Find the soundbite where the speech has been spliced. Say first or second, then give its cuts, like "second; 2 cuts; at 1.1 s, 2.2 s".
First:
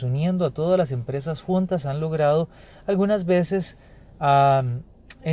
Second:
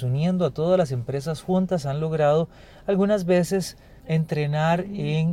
second; 1 cut; at 4.0 s